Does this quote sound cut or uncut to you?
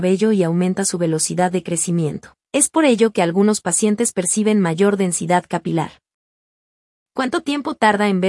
cut